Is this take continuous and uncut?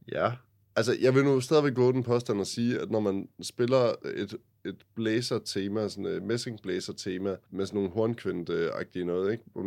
yes; 0 cuts

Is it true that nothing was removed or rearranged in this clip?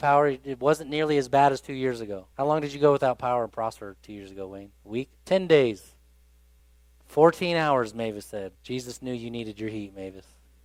no; 4 cuts; at 2.3 s, 5.2 s, 6.6 s, 8.5 s

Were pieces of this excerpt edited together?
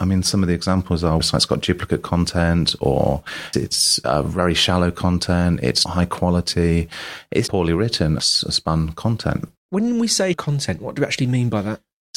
yes; 6 cuts; at 1.2 s, 3.5 s, 5.9 s, 7.5 s, 8.2 s, 10.3 s

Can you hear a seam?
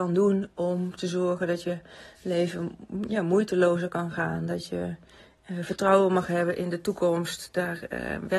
no; 0 cuts

